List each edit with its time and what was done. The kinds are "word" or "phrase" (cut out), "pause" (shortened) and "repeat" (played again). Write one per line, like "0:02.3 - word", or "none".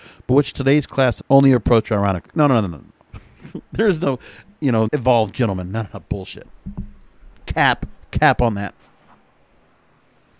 0:01.2 - phrase
0:04.9 - word